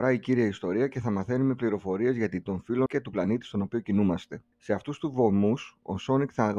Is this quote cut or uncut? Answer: cut